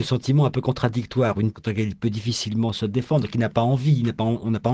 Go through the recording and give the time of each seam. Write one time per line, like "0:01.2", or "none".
0:01.5